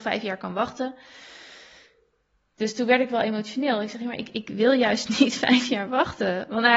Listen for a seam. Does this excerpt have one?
no; 0 cuts

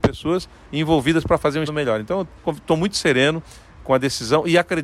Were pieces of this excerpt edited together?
yes; 2 cuts; at 1.7 s, 2.4 s

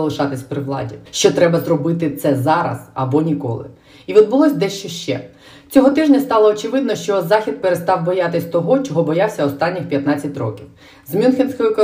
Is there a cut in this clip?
no; 0 cuts

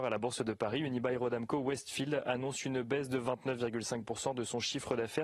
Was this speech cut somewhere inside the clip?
no; 0 cuts

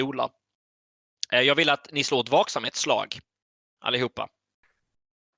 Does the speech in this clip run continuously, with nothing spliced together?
yes; 0 cuts

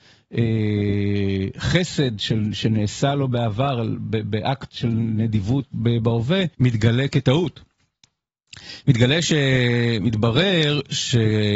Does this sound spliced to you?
yes; 1 cut; at 6.5 s

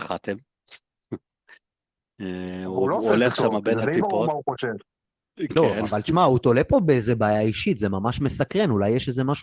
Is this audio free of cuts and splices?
yes; 0 cuts

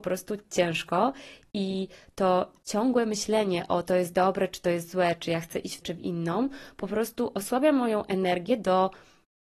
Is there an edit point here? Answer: yes; 2 cuts; at 3.8 s, 5.8 s

